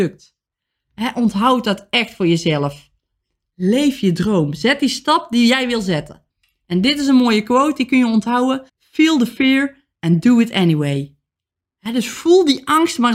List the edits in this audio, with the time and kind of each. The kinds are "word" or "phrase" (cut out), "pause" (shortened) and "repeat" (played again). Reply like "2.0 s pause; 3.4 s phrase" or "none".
8.7 s pause